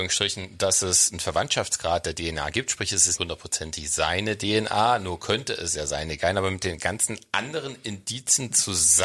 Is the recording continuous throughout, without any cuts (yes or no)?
no